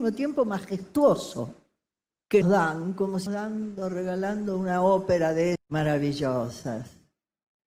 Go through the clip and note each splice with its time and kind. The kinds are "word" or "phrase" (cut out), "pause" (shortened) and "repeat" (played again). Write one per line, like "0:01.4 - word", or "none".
0:02.4 - word
0:03.3 - word
0:05.6 - word